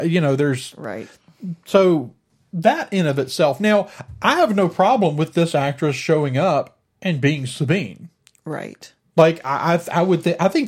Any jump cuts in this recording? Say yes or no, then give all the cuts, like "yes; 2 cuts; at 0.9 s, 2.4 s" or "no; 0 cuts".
no; 0 cuts